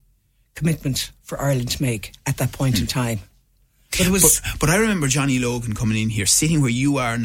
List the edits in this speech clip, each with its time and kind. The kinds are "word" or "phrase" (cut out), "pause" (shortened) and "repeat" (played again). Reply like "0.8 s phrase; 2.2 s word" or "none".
none